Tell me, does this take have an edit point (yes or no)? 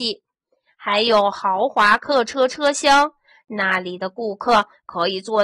no